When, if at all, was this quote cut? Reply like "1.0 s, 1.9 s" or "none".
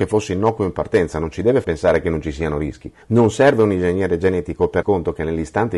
1.6 s, 3.0 s, 4.8 s